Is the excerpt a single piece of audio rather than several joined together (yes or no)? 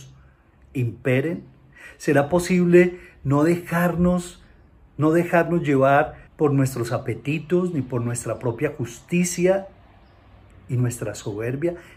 no